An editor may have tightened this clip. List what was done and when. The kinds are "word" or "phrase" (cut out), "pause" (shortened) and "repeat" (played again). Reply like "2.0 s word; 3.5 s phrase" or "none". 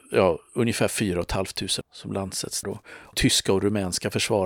1.8 s word; 2.6 s word; 3.1 s word

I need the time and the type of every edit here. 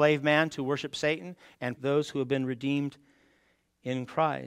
1.8 s word

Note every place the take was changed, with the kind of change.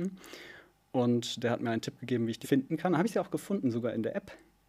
2.4 s word

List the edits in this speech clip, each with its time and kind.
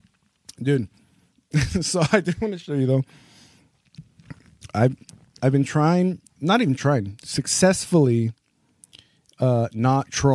6.3 s pause

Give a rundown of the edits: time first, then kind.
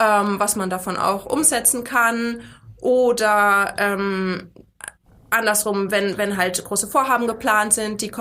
none

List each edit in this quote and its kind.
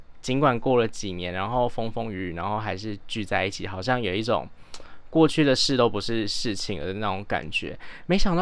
none

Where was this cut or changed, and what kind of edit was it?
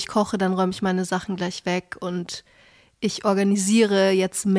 none

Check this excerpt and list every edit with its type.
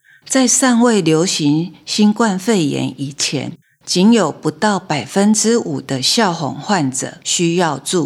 3.6 s pause

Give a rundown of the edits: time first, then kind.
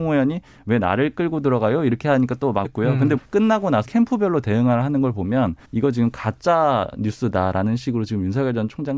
2.6 s word; 3.2 s word; 3.8 s word; 5.6 s pause

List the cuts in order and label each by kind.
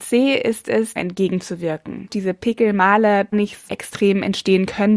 1.0 s phrase; 2.1 s word; 3.3 s word; 3.7 s word

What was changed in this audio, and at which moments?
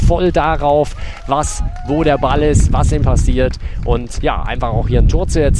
3.0 s word; 4.2 s word

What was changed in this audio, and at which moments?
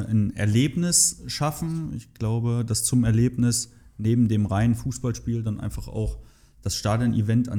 none

